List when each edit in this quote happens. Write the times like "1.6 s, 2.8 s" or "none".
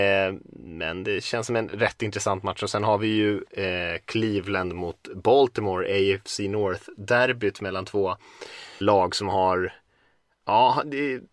8.8 s